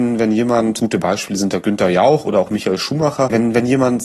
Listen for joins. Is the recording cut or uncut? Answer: uncut